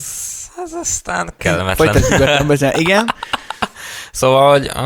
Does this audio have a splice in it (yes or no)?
yes